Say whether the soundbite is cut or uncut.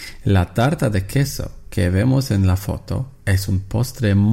uncut